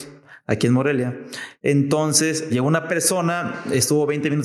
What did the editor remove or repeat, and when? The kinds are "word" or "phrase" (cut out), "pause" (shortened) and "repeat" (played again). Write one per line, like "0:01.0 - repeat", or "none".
0:02.5 - word